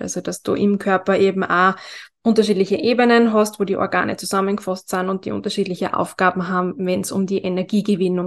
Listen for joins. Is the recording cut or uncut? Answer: uncut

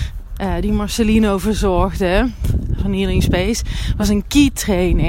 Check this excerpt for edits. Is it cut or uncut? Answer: uncut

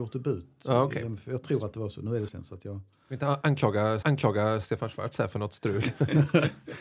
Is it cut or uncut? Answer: cut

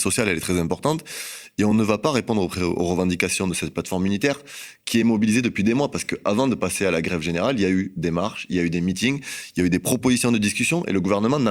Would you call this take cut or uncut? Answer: uncut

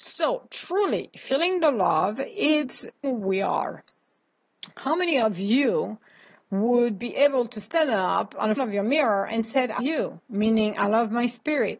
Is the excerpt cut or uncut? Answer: cut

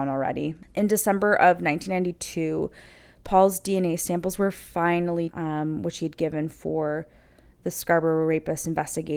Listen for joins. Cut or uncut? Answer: cut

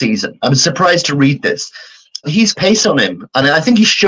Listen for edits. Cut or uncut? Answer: cut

